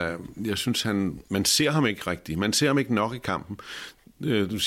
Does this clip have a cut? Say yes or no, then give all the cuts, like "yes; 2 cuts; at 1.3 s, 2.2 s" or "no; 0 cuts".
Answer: yes; 1 cut; at 1.2 s